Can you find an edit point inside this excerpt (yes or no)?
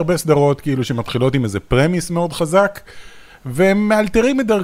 no